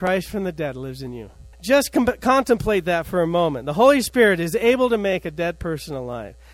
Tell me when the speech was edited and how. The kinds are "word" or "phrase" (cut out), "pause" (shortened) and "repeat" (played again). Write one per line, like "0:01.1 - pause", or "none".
0:01.5 - pause